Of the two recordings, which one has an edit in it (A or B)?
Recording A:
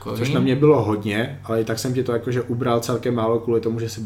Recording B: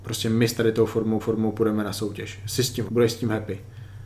B